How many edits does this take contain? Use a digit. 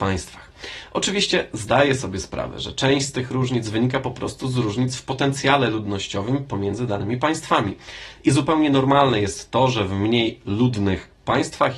0